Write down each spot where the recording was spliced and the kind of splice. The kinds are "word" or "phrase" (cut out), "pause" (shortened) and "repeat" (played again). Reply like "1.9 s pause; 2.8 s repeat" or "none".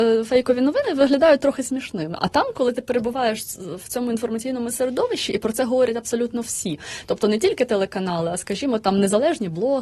none